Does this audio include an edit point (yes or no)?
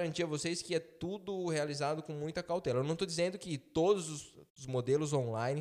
no